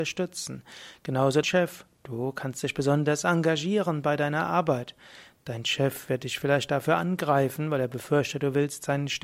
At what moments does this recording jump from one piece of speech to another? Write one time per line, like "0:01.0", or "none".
0:01.4

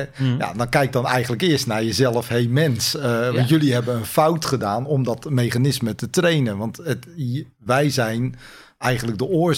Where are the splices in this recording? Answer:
none

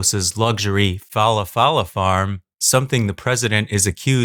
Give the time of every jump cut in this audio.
none

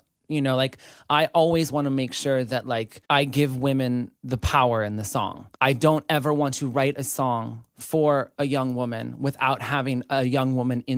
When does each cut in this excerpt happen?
0:03.1
0:04.2
0:05.5

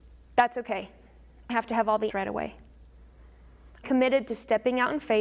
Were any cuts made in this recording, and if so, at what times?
0:01.5
0:02.1
0:03.8

